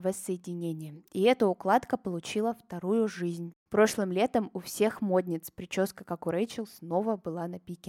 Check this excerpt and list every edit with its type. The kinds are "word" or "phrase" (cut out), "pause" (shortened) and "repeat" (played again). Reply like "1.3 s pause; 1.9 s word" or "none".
none